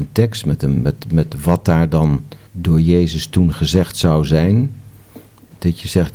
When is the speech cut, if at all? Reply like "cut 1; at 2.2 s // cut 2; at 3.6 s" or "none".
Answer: cut 1; at 2.5 s